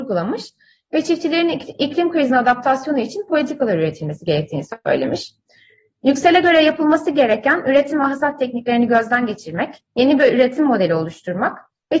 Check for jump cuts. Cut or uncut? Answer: cut